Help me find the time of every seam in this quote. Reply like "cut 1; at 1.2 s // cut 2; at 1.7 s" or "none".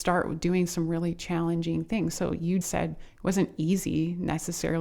cut 1; at 2.6 s

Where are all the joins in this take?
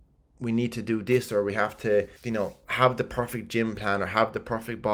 cut 1; at 2.2 s

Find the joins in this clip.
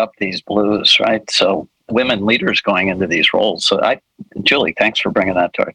cut 1; at 1.9 s

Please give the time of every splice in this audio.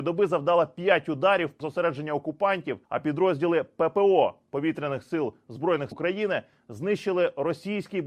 cut 1; at 1.6 s // cut 2; at 2.8 s // cut 3; at 5.9 s

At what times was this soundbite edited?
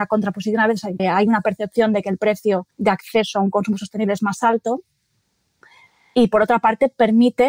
cut 1; at 1.0 s // cut 2; at 2.7 s

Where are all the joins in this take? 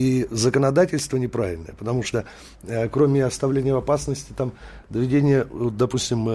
none

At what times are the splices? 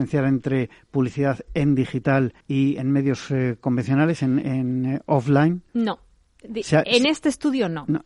cut 1; at 2.4 s // cut 2; at 5.7 s

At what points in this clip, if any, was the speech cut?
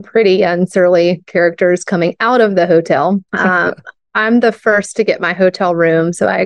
cut 1; at 3.3 s

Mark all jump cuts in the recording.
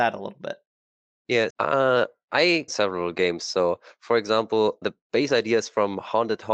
cut 1; at 1.5 s // cut 2; at 2.7 s // cut 3; at 4.8 s

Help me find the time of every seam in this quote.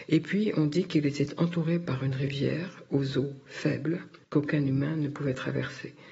cut 1; at 4.2 s

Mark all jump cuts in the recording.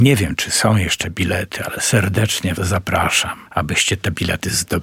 cut 1; at 2.6 s // cut 2; at 3.5 s

